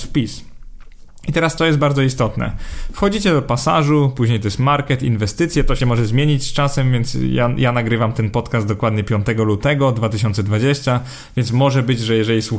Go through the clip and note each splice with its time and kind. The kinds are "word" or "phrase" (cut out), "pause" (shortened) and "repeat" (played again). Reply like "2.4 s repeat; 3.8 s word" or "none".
1.6 s phrase; 5.8 s word